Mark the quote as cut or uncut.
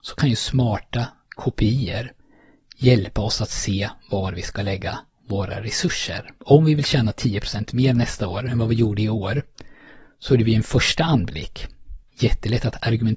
cut